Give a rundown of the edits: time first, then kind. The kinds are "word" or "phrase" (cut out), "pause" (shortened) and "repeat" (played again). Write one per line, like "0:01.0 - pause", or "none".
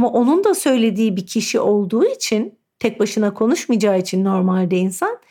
none

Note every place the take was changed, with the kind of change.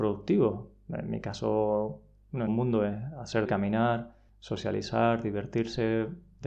0:02.5 - phrase
0:03.5 - word
0:04.3 - pause

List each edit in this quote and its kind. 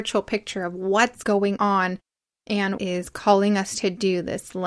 0:02.8 - phrase

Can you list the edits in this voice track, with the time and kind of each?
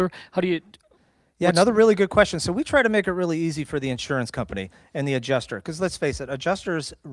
none

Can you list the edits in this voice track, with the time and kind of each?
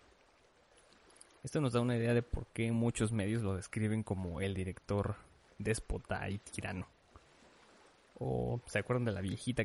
none

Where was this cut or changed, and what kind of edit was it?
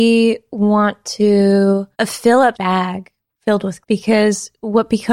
0:01.9 - pause
0:02.5 - word
0:03.8 - word

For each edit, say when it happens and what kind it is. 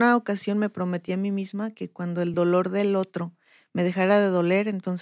none

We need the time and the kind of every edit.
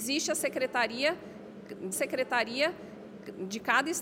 0:01.9 - repeat

